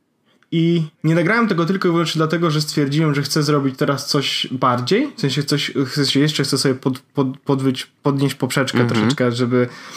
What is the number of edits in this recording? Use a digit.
2